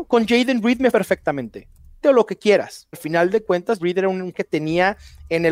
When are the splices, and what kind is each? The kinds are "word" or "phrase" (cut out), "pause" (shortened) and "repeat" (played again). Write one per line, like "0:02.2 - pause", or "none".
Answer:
0:00.9 - word
0:02.0 - word
0:02.9 - word
0:03.8 - word
0:04.3 - word

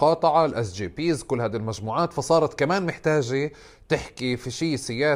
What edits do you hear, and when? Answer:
none

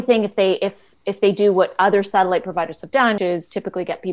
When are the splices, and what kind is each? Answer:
0:03.2 - word

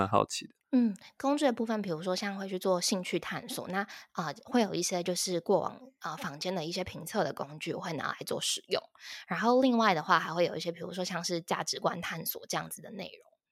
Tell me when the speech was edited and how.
none

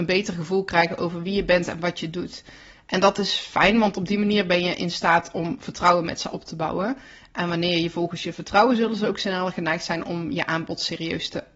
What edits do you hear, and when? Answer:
none

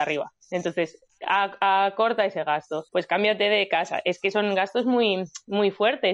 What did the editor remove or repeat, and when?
0:02.9 - pause

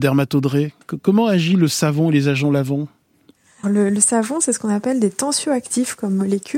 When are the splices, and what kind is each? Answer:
0:03.6 - word

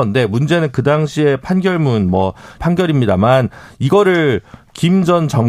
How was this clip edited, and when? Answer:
0:02.6 - word

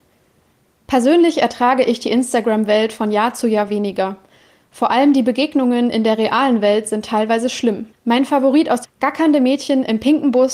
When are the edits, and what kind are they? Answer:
0:07.9 - pause
0:08.8 - phrase

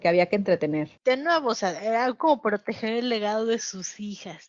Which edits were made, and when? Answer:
0:01.0 - pause

